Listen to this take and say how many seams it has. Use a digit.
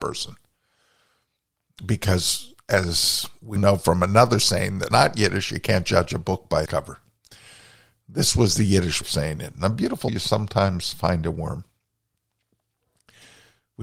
5